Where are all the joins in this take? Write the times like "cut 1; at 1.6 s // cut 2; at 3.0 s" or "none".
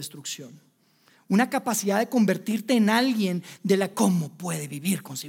cut 1; at 3.9 s